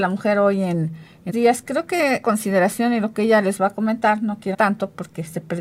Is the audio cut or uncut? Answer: cut